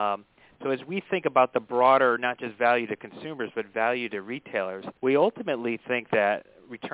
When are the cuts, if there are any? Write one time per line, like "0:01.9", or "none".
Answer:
0:05.0